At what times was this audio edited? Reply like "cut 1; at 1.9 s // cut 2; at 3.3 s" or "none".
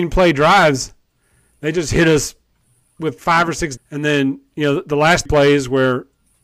cut 1; at 3.2 s // cut 2; at 3.8 s // cut 3; at 5.3 s